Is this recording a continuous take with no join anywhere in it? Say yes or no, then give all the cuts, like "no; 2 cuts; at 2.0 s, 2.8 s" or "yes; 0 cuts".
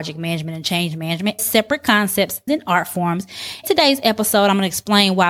no; 3 cuts; at 1.4 s, 2.5 s, 3.6 s